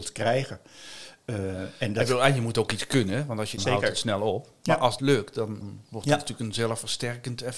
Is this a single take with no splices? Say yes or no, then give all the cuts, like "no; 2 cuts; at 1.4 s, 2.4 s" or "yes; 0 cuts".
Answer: no; 3 cuts; at 3.6 s, 5.0 s, 5.6 s